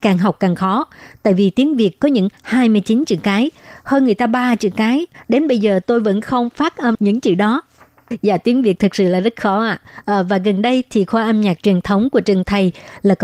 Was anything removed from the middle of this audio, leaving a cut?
yes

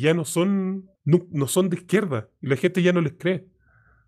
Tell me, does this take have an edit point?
yes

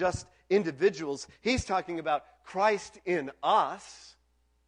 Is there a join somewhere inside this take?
no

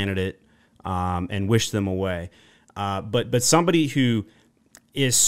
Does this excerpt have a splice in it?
no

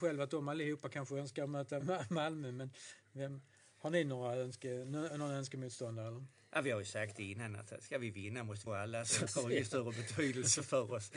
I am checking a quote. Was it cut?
yes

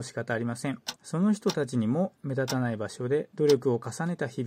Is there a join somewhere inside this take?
yes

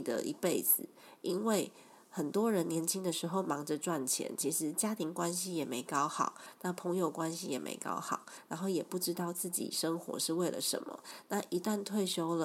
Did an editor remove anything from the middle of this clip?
no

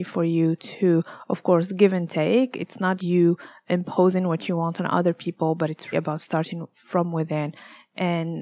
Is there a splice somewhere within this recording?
yes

